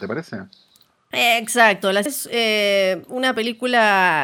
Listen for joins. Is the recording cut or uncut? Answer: cut